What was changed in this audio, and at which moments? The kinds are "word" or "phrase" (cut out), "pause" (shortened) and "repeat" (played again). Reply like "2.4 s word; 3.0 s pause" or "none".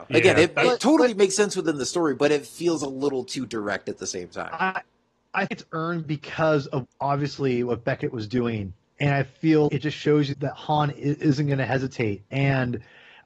5.5 s word; 6.8 s word; 9.7 s word; 10.3 s word

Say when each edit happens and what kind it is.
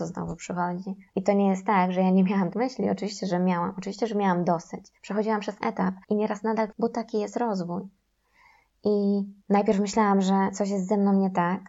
1.1 s pause; 2.5 s word; 5.0 s pause; 5.6 s phrase; 6.0 s pause; 6.7 s word; 9.4 s pause

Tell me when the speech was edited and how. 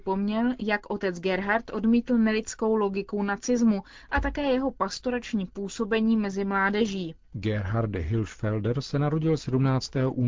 7.2 s pause

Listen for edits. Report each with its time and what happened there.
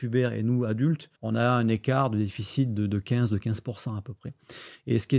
1.2 s pause

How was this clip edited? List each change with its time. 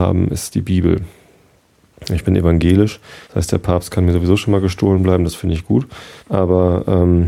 3.2 s pause; 6.2 s pause

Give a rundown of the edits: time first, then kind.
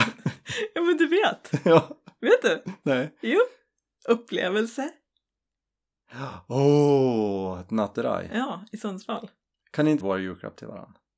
10.0 s phrase

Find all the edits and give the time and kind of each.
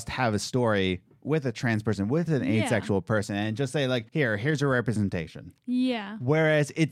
4.1 s pause; 5.6 s pause

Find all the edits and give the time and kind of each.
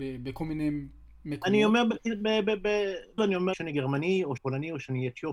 3.2 s word; 3.5 s word; 4.4 s word

